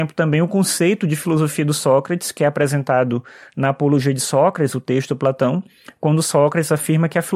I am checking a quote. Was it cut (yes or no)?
no